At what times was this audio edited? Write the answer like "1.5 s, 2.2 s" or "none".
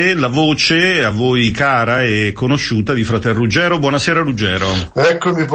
none